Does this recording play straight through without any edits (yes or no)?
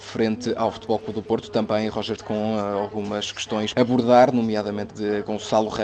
no